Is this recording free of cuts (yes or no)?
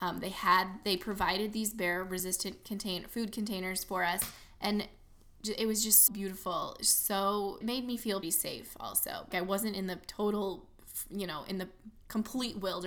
no